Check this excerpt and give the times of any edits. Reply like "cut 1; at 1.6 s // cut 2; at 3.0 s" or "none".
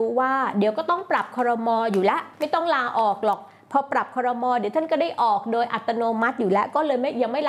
cut 1; at 2.3 s